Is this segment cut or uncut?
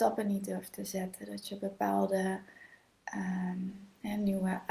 uncut